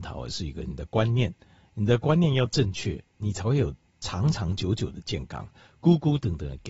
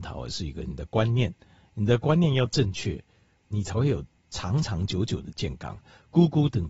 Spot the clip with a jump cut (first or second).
first